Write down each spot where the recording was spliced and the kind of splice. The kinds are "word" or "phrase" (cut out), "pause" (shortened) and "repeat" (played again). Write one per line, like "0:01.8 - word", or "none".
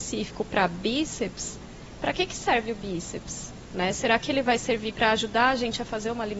none